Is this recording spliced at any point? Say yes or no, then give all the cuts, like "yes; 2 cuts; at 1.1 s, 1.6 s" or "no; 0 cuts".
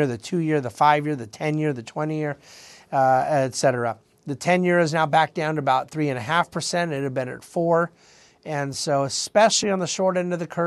no; 0 cuts